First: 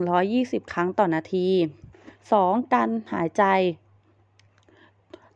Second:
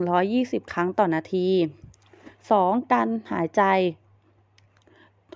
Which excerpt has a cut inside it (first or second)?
first